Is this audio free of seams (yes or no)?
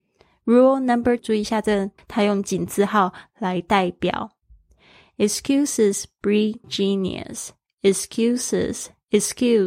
no